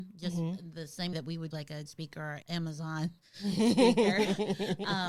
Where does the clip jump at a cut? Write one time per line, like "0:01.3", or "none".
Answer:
0:01.1
0:01.5
0:01.9
0:02.4